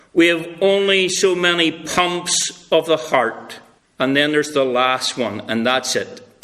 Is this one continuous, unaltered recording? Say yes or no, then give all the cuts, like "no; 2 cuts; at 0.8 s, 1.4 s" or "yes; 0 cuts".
no; 1 cut; at 3.8 s